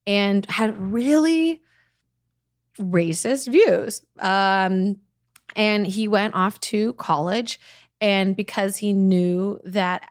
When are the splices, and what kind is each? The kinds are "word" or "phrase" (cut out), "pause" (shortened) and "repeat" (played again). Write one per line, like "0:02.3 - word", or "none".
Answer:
none